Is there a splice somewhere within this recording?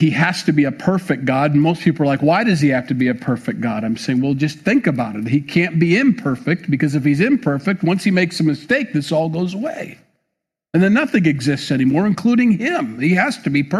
no; 0 cuts

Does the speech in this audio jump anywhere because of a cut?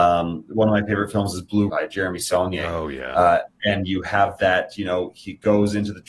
yes; 1 cut; at 1.7 s

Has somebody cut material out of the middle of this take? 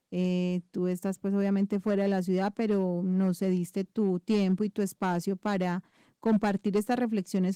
no; 0 cuts

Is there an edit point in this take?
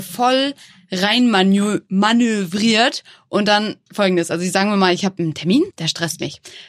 yes; 2 cuts; at 3.8 s, 5.7 s

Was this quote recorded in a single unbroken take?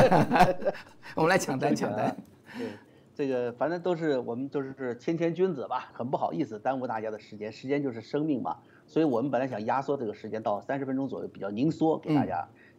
no; 1 cut; at 5.9 s

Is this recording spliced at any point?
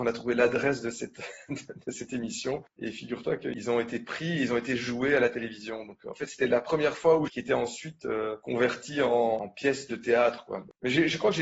yes; 1 cut; at 7.3 s

